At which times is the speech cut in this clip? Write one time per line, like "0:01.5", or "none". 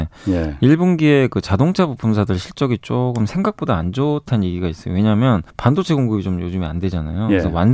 0:05.5